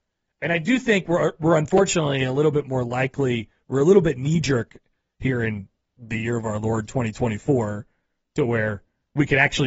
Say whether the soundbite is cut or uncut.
uncut